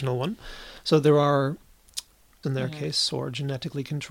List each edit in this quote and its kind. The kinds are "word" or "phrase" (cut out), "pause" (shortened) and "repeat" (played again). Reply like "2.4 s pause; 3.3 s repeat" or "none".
2.4 s word